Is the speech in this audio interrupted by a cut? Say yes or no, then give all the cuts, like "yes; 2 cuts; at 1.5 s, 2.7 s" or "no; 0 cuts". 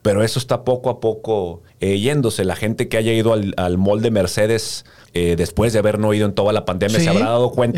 yes; 2 cuts; at 1.7 s, 5.0 s